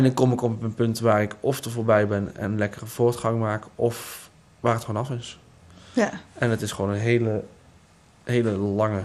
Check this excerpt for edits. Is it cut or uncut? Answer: uncut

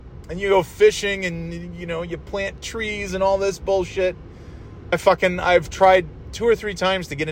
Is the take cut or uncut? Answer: cut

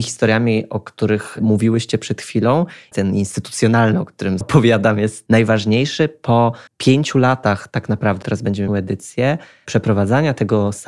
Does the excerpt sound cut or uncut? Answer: cut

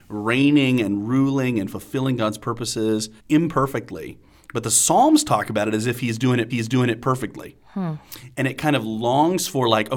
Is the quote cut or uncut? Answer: cut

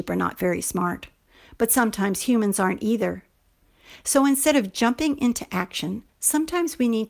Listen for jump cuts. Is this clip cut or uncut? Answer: cut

